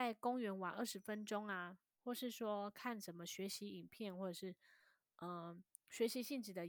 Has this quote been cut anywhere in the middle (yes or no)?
no